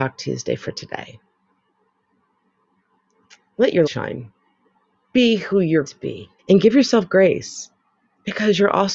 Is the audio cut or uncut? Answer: cut